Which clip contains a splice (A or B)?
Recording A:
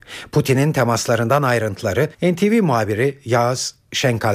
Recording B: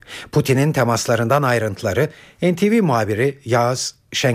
A